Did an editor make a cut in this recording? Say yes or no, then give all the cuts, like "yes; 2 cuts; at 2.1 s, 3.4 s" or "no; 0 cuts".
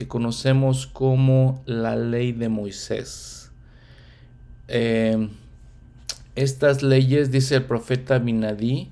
no; 0 cuts